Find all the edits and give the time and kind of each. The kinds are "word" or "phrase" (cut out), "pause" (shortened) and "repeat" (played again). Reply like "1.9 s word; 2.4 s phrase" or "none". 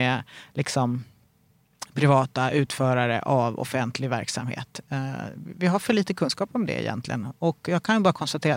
none

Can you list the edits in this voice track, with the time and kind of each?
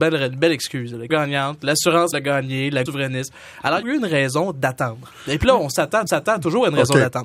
1.1 s word; 2.1 s word; 2.9 s word; 3.8 s phrase; 6.1 s repeat

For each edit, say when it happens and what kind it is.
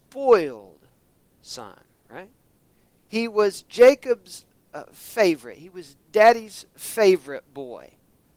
6.0 s pause

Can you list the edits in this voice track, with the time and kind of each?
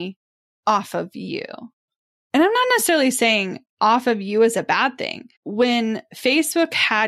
5.3 s pause

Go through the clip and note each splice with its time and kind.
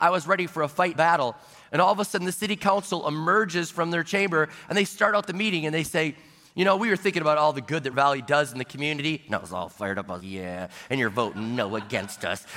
0.9 s phrase; 7.9 s word; 10.2 s word

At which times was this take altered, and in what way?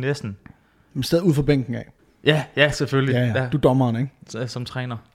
2.0 s pause

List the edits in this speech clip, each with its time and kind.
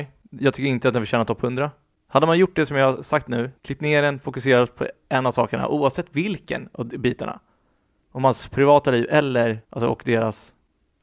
3.6 s pause; 9.6 s pause

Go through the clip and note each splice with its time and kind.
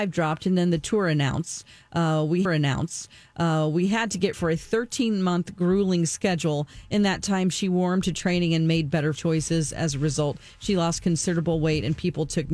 2.5 s repeat; 4.3 s word; 9.2 s word

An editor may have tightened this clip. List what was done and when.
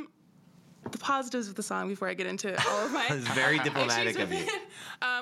none

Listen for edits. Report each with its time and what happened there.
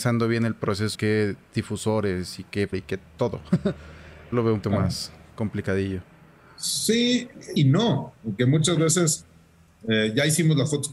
0.9 s word; 2.7 s word; 4.3 s word; 4.6 s word; 7.6 s word; 8.4 s word

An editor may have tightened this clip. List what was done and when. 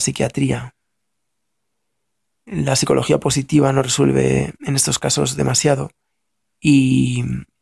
4.6 s pause; 6.1 s pause

